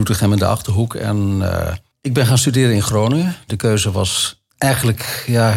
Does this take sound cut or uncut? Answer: cut